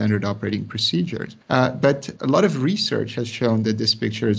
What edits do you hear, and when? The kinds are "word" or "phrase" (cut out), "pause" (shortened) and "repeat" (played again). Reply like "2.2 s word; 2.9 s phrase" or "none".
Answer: 1.4 s pause; 2.2 s word